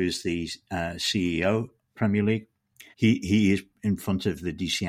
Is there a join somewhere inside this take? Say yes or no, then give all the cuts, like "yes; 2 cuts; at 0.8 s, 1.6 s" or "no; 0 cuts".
yes; 2 cuts; at 2.0 s, 2.9 s